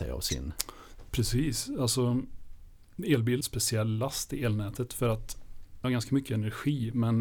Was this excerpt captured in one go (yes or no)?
no